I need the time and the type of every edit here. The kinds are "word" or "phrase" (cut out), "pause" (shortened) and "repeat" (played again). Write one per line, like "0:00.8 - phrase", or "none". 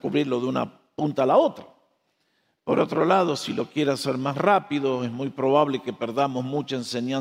none